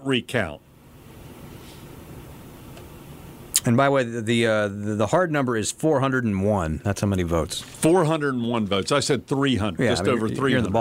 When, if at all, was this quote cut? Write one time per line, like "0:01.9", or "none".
none